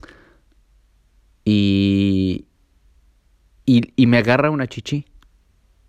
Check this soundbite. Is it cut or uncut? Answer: uncut